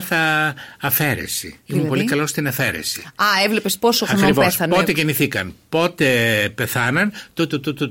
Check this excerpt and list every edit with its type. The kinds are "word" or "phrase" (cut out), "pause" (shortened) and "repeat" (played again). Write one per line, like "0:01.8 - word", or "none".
0:01.6 - pause